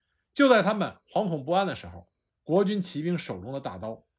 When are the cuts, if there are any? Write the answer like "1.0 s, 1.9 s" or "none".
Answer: 2.3 s